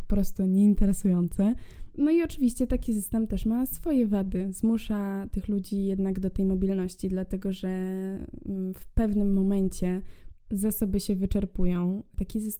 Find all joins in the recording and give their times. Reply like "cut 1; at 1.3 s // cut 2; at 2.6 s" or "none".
none